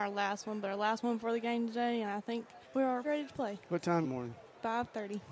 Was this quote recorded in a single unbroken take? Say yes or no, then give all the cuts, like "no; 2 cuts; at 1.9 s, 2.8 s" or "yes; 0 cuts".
no; 3 cuts; at 2.6 s, 3.0 s, 4.0 s